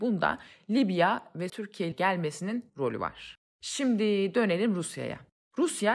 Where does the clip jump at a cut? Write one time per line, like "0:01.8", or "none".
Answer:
0:01.5
0:01.9
0:02.7